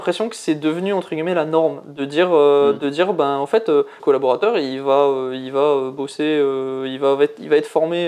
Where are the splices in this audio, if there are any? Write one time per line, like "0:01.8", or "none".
0:04.0